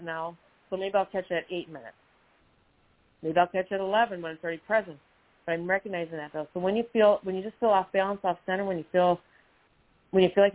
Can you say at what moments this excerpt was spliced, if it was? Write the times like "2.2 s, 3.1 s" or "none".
none